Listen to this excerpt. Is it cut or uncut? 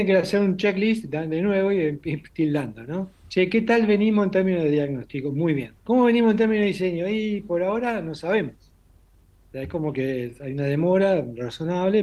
cut